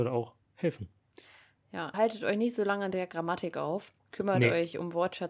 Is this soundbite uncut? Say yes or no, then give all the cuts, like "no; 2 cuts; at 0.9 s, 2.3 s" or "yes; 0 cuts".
no; 2 cuts; at 1.9 s, 4.0 s